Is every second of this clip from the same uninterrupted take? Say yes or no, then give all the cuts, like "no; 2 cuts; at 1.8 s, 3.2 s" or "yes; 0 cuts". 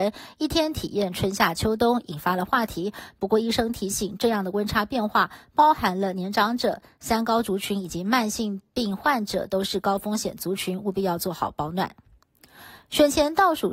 yes; 0 cuts